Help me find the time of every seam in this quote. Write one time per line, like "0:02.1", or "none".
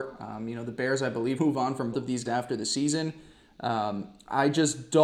0:01.4
0:01.9
0:02.3